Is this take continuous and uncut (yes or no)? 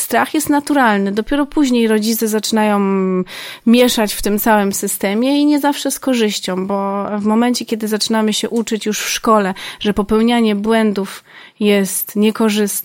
yes